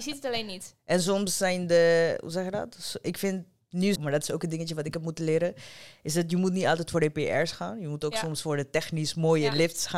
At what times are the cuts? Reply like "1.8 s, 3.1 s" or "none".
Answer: 4.0 s